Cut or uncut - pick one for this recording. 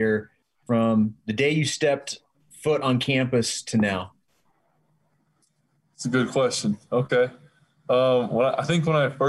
uncut